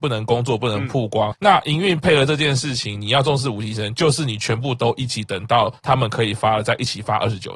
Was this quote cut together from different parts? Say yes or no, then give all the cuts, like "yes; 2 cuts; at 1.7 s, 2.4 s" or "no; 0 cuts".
yes; 1 cut; at 1.3 s